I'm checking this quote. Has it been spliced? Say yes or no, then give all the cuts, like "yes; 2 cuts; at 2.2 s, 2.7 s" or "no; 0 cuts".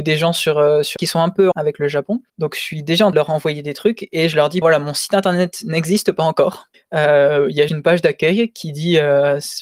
yes; 7 cuts; at 1.0 s, 1.5 s, 2.3 s, 3.1 s, 4.6 s, 6.7 s, 7.7 s